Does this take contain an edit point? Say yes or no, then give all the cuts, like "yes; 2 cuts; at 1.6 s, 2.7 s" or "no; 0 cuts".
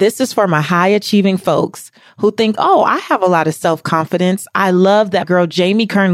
yes; 1 cut; at 5.2 s